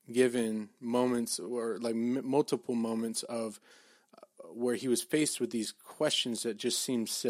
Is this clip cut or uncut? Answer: uncut